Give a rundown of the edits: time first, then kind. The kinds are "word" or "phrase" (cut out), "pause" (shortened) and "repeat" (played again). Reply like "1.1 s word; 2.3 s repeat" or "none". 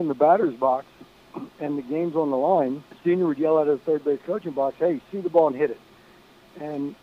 2.9 s pause

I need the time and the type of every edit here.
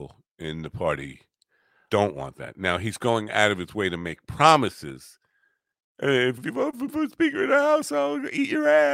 1.9 s word; 6.4 s word; 6.9 s word

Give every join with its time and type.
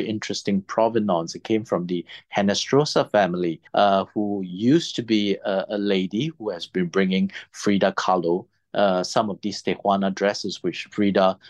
3.7 s pause

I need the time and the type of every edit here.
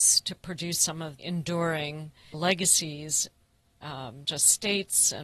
1.2 s word; 2.3 s word; 4.2 s word

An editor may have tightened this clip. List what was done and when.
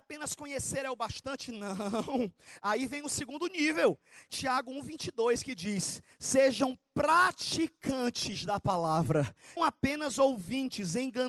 4.3 s phrase; 9.6 s phrase

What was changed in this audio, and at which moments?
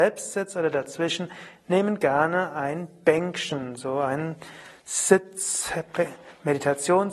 none

